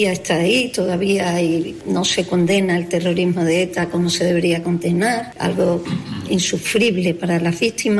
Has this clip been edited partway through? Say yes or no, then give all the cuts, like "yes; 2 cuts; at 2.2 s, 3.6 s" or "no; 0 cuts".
no; 0 cuts